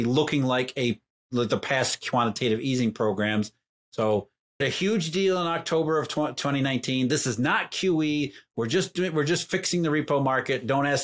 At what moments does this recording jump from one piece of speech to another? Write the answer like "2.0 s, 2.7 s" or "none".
4.6 s